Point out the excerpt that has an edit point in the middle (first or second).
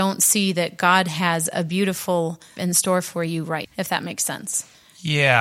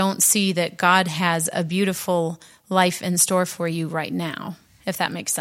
first